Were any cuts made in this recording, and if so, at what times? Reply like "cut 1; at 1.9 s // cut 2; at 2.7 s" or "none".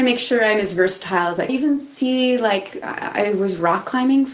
cut 1; at 1.5 s